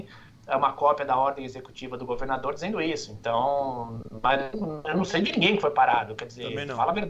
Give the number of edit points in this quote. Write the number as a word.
zero